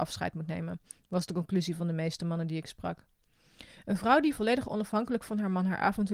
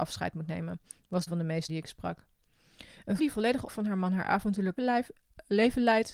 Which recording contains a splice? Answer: second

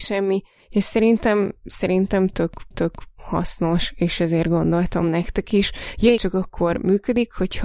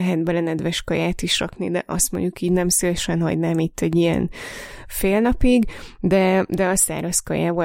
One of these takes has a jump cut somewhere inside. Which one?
first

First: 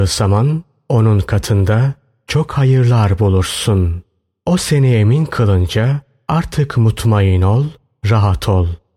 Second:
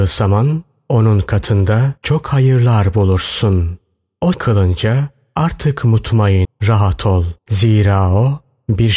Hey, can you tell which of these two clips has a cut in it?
second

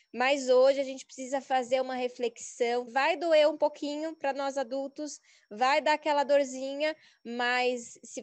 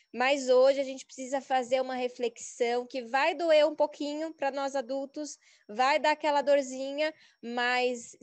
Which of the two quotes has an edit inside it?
first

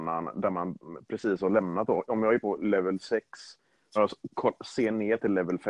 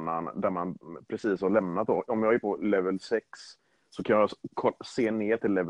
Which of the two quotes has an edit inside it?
first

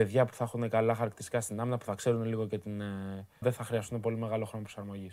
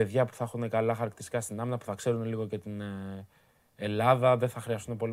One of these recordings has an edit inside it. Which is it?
first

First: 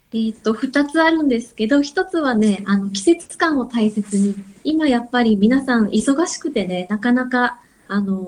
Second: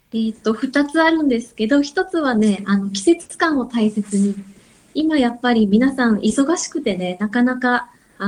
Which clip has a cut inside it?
first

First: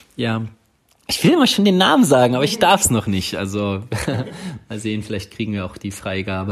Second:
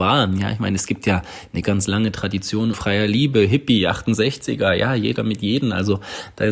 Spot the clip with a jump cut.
second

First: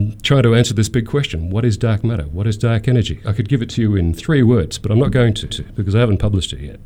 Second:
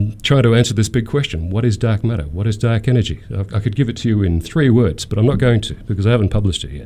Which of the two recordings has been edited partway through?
first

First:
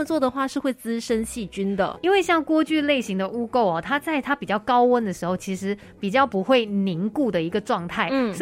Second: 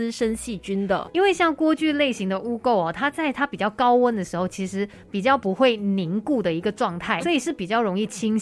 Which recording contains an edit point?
second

